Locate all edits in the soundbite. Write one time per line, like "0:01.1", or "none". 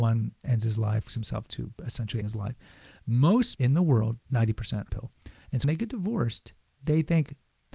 0:01.1
0:01.5
0:02.2
0:03.5
0:04.9
0:05.6